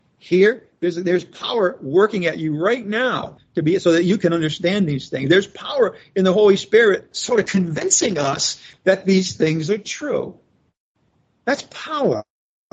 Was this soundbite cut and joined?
no; 0 cuts

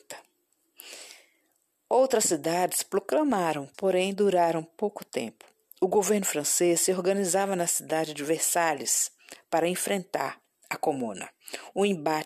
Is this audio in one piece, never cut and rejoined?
no; 1 cut; at 3.7 s

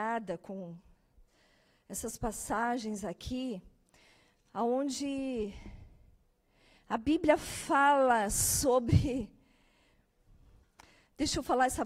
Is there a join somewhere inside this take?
no; 0 cuts

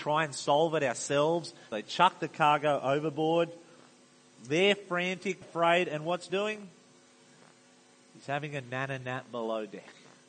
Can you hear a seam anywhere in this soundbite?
yes; 3 cuts; at 1.7 s, 5.4 s, 6.3 s

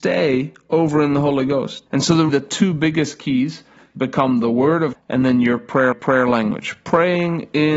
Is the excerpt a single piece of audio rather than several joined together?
no; 4 cuts; at 1.9 s, 2.3 s, 4.9 s, 5.9 s

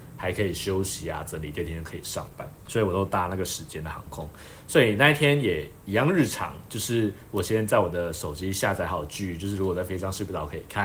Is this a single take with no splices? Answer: no; 1 cut; at 2.6 s

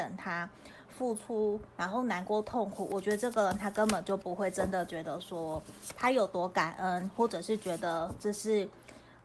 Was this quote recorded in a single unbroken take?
yes; 0 cuts

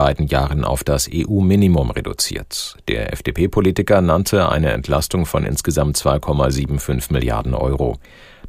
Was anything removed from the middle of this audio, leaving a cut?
no; 0 cuts

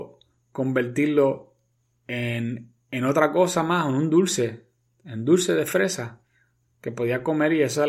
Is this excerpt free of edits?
yes; 0 cuts

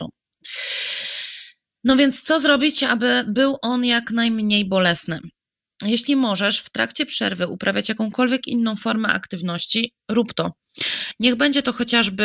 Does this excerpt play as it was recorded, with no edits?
yes; 0 cuts

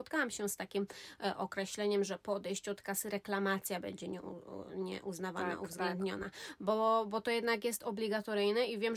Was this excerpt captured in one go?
yes; 0 cuts

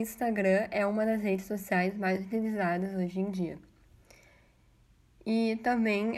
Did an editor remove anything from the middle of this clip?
no; 0 cuts

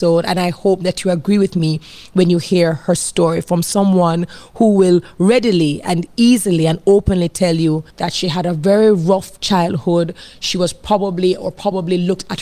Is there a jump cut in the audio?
yes; 1 cut; at 7.9 s

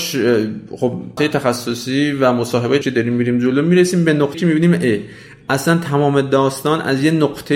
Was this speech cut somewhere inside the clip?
yes; 3 cuts; at 1.2 s, 2.8 s, 4.3 s

